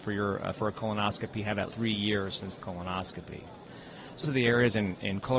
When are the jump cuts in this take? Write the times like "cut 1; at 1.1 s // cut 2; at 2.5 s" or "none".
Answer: cut 1; at 1.7 s // cut 2; at 2.6 s // cut 3; at 4.2 s